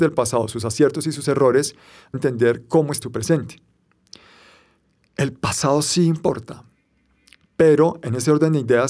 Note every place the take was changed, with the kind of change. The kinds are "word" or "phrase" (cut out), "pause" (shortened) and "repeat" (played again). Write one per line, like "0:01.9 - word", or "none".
0:02.1 - phrase
0:03.0 - word